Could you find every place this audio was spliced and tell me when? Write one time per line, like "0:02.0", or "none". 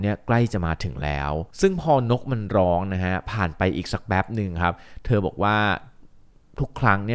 0:01.5

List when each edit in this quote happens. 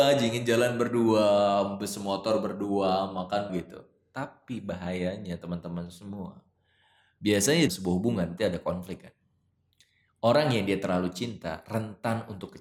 0:03.5
0:07.7
0:08.4

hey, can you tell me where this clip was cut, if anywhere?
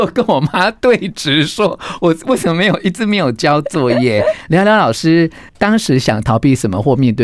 0:05.5

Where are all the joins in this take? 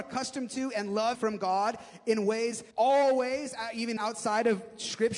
0:01.1
0:02.7
0:04.0

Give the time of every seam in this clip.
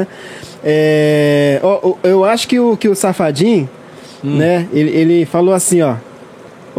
none

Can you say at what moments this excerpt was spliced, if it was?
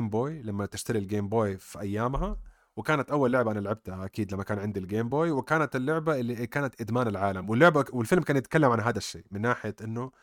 none

